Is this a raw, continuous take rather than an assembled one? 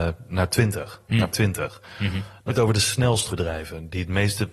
no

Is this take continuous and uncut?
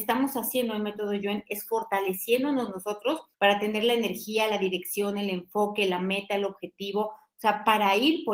no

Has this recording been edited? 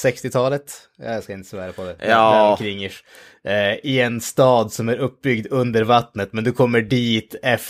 no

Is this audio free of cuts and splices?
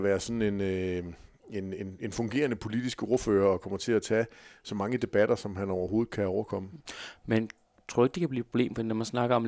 yes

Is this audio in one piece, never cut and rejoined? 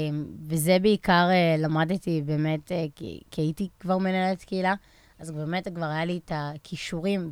yes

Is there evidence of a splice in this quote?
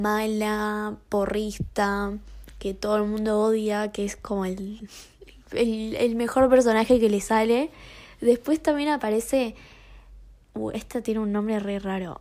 no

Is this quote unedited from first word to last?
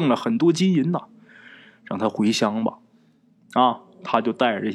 yes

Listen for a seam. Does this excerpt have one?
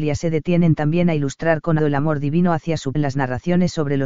yes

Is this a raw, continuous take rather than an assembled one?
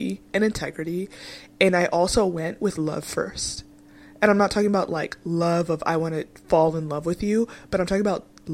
yes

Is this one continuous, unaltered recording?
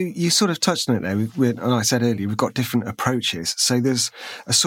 yes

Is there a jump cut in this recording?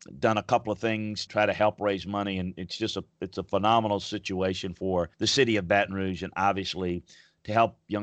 yes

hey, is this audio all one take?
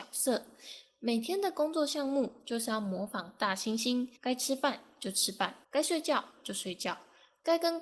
no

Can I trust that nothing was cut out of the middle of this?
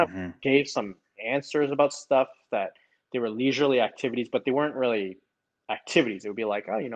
yes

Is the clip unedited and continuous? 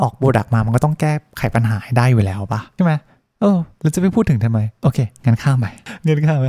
yes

